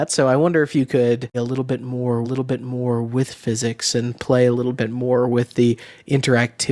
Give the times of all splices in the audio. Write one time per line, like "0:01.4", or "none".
0:01.3
0:02.2